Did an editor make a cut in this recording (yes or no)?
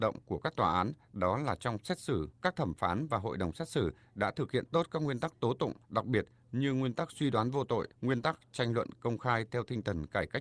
yes